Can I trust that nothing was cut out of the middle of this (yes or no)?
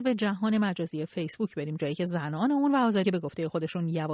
no